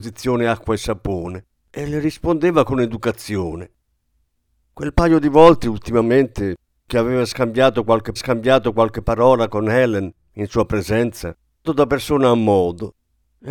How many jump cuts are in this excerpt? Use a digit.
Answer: 3